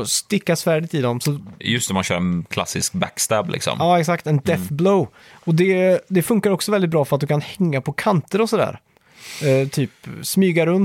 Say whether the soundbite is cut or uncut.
uncut